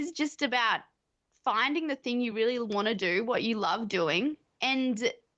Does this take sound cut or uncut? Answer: uncut